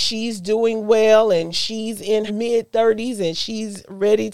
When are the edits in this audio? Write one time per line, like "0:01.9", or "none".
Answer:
0:02.3